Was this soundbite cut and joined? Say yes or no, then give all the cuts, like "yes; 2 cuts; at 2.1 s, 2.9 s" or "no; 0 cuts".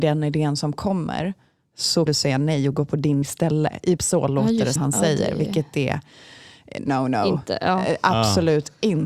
yes; 5 cuts; at 2.1 s, 3.2 s, 4.0 s, 4.8 s, 6.9 s